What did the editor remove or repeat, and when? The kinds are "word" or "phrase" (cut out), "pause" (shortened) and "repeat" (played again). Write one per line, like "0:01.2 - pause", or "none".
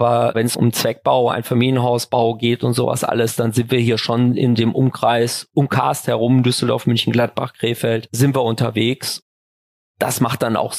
none